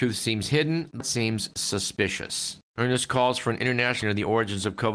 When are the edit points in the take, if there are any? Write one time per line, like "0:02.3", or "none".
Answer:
0:01.0
0:02.7
0:04.0